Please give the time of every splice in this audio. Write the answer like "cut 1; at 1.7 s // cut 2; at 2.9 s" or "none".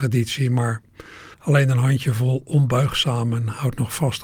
cut 1; at 1.3 s

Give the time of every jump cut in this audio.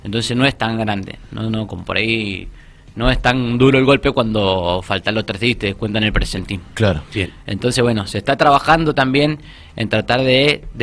none

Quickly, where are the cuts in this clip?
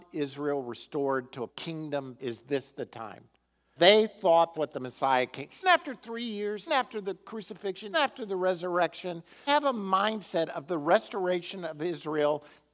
cut 1; at 1.5 s // cut 2; at 2.2 s // cut 3; at 3.8 s // cut 4; at 4.5 s // cut 5; at 5.6 s // cut 6; at 6.7 s // cut 7; at 7.9 s // cut 8; at 9.5 s

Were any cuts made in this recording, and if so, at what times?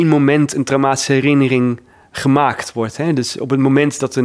none

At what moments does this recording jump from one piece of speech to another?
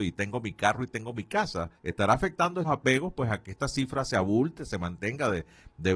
cut 1; at 1.8 s // cut 2; at 2.6 s

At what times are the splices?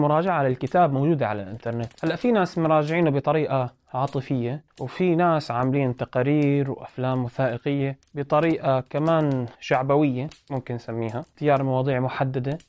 cut 1; at 9.5 s

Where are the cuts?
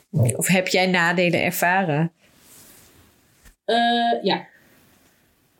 none

